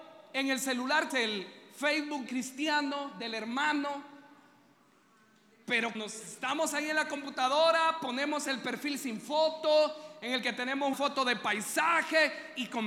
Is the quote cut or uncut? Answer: cut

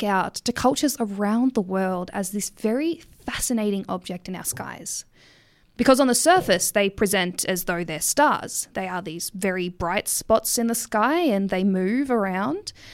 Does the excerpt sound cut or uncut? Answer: uncut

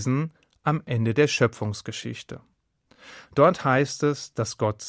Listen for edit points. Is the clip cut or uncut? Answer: uncut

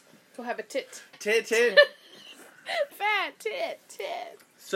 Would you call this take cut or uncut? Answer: cut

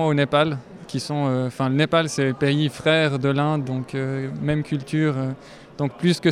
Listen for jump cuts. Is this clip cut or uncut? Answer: uncut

